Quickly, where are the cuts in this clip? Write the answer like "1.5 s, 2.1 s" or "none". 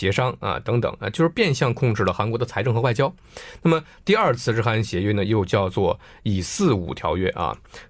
none